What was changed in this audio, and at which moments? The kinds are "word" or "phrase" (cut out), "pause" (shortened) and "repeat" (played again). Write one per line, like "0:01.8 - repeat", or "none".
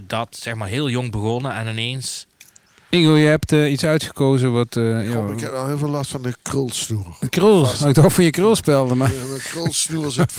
none